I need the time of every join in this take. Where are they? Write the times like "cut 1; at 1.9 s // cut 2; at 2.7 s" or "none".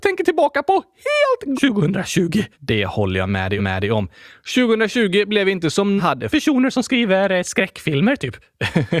cut 1; at 1.5 s // cut 2; at 2.5 s // cut 3; at 3.6 s // cut 4; at 6.0 s // cut 5; at 6.3 s